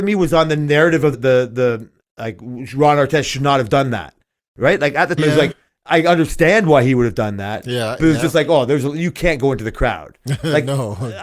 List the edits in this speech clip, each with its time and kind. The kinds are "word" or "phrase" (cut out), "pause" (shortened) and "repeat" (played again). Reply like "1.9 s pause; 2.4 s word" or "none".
1.1 s word; 5.2 s word